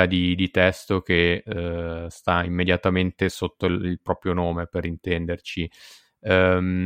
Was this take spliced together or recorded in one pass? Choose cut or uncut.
uncut